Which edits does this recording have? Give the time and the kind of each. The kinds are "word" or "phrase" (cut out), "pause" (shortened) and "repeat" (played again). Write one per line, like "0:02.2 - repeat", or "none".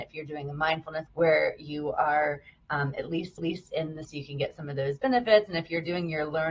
0:01.1 - phrase
0:03.4 - repeat
0:04.0 - word